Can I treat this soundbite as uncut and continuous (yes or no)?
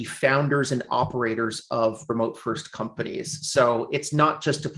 yes